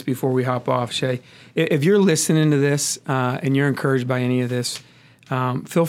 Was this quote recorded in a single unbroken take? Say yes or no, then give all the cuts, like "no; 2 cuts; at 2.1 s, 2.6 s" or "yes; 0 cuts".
yes; 0 cuts